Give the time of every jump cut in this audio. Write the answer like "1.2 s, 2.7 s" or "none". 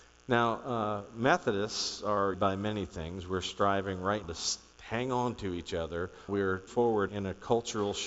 2.3 s, 4.2 s, 4.7 s, 6.3 s, 6.7 s, 7.1 s